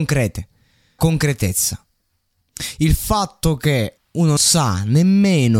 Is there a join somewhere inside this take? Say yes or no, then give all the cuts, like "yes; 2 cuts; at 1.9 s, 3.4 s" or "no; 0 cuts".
yes; 3 cuts; at 1.0 s, 4.0 s, 4.4 s